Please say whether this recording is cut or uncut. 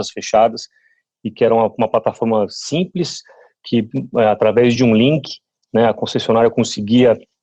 uncut